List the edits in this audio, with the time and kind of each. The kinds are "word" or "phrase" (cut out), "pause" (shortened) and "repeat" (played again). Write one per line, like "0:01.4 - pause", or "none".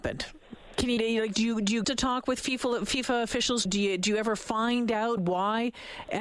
0:01.0 - word
0:01.8 - word
0:03.7 - word
0:05.2 - word